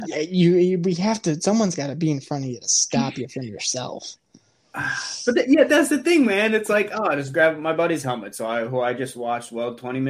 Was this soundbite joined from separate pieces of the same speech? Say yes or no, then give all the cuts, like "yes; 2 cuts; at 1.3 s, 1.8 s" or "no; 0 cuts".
no; 0 cuts